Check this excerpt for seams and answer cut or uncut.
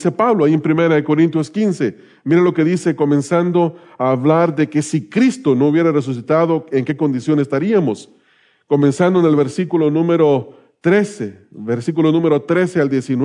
uncut